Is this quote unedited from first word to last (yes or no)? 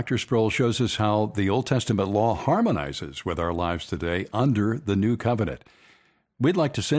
yes